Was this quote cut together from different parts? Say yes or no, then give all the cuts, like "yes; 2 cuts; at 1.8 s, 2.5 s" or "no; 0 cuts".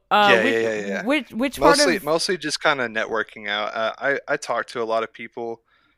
no; 0 cuts